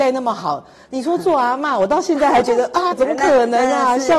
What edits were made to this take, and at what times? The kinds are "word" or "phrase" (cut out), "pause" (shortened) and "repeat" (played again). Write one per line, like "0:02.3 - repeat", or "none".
0:02.9 - word